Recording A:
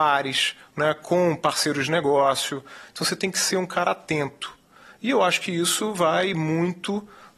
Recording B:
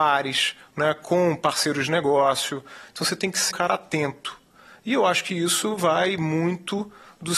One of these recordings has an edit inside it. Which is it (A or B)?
B